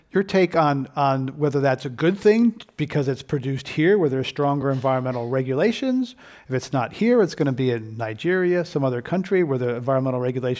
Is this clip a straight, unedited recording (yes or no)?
yes